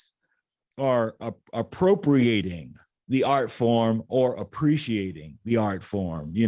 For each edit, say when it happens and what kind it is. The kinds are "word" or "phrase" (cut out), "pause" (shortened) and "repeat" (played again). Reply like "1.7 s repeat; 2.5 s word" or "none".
2.9 s pause